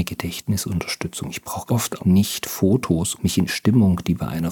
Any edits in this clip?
yes; 4 cuts; at 1.7 s, 2.0 s, 3.2 s, 3.5 s

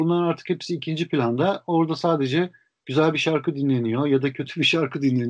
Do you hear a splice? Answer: no; 0 cuts

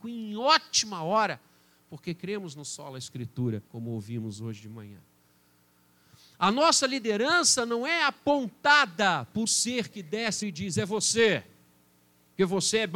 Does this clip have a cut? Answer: yes; 3 cuts; at 3.7 s, 9.5 s, 10.4 s

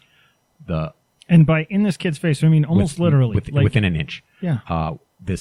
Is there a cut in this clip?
no; 0 cuts

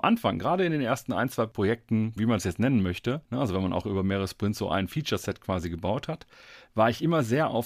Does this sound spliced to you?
yes; 2 cuts; at 2.2 s, 3.2 s

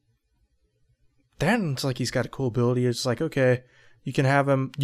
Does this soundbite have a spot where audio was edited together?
no; 0 cuts

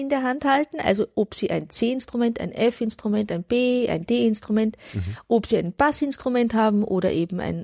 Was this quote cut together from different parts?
no; 0 cuts

